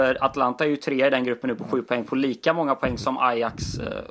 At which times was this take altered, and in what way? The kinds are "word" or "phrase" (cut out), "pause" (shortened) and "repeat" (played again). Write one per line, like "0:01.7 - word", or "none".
none